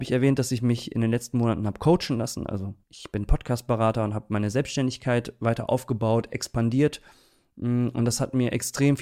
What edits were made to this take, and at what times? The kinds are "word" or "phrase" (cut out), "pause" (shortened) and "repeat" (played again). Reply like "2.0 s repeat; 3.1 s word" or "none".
2.8 s pause